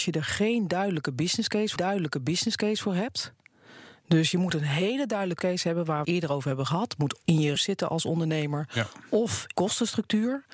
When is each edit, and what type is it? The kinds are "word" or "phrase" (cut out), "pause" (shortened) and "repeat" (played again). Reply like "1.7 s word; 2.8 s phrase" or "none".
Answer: 1.8 s repeat; 5.4 s word; 6.0 s word; 7.2 s word; 7.6 s word; 9.5 s phrase